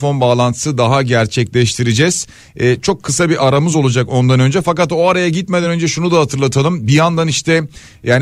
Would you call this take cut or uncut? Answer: uncut